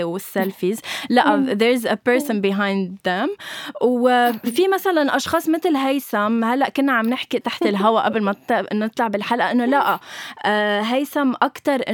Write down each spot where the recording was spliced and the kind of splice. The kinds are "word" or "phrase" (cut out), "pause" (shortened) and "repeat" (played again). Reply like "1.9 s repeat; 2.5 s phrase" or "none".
7.4 s word